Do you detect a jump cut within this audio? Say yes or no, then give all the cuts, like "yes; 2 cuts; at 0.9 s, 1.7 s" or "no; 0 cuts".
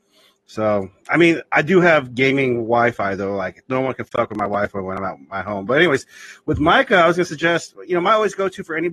no; 0 cuts